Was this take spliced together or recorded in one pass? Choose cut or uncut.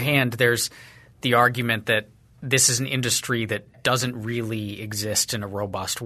uncut